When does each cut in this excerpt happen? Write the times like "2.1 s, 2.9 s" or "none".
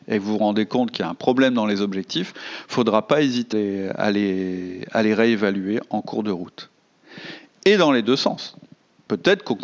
3.5 s